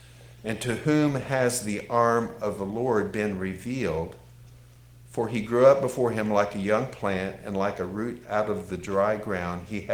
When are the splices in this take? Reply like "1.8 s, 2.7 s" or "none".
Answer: none